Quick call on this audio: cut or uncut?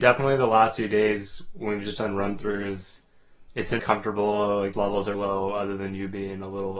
cut